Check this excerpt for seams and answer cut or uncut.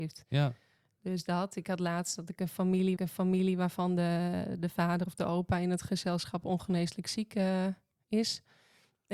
cut